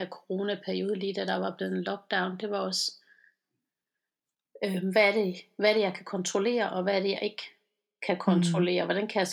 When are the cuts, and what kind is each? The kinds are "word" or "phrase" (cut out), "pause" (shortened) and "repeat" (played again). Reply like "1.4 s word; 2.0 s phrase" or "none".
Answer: none